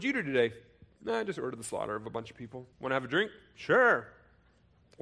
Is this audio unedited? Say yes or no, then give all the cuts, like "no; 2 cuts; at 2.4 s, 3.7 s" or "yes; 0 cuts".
no; 1 cut; at 2.7 s